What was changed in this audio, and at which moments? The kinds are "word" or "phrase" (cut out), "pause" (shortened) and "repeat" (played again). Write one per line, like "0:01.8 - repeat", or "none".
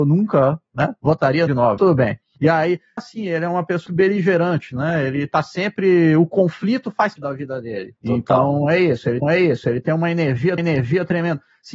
0:01.5 - phrase
0:01.8 - word
0:03.0 - phrase
0:03.9 - word
0:07.2 - word
0:08.0 - pause
0:09.2 - repeat
0:10.6 - repeat